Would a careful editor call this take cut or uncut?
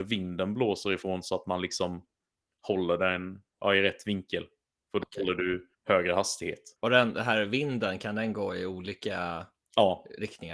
cut